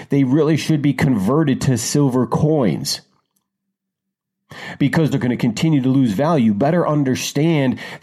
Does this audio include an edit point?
yes; 1 cut; at 5.1 s

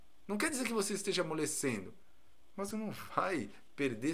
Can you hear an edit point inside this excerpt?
yes; 1 cut; at 2.7 s

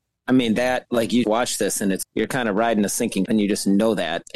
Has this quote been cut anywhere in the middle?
yes; 3 cuts; at 1.2 s, 2.0 s, 3.3 s

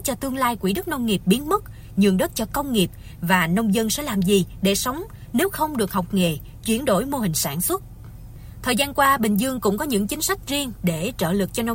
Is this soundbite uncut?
yes; 0 cuts

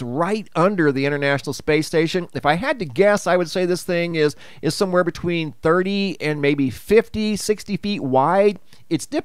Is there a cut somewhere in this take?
no; 0 cuts

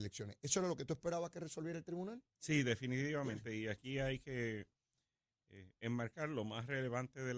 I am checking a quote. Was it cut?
no; 0 cuts

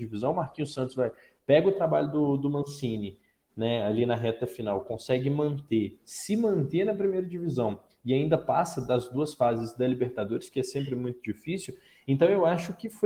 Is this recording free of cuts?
yes; 0 cuts

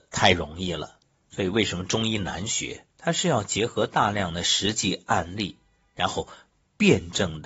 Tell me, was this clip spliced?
yes; 2 cuts; at 1.0 s, 2.9 s

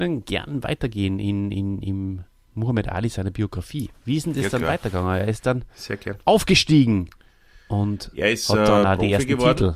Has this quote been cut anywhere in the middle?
no; 0 cuts

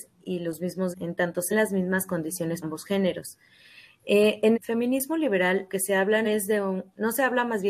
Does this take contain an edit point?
yes; 6 cuts; at 0.9 s, 1.5 s, 2.6 s, 4.5 s, 5.7 s, 6.2 s

